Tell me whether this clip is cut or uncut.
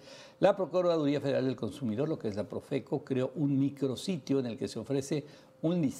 uncut